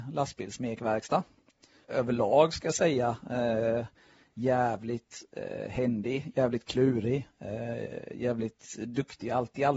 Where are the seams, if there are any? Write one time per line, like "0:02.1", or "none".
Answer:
none